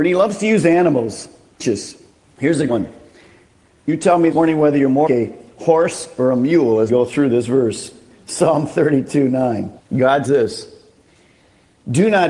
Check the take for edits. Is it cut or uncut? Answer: cut